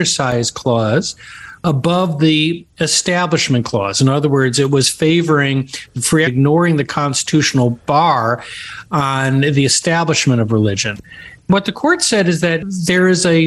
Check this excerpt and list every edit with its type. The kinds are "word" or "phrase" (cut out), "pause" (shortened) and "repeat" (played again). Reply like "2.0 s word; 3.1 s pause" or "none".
6.3 s phrase